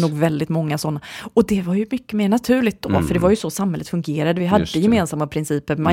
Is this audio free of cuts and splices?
yes; 0 cuts

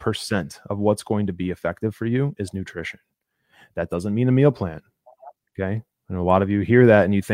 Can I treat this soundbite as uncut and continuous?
yes; 0 cuts

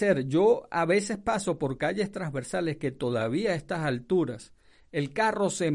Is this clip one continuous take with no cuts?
yes; 0 cuts

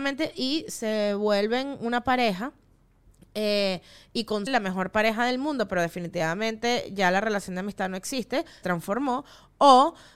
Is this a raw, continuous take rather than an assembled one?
no; 2 cuts; at 4.5 s, 8.6 s

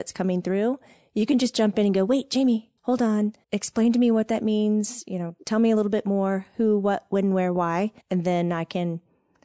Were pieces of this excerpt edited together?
yes; 3 cuts; at 2.8 s, 3.4 s, 8.0 s

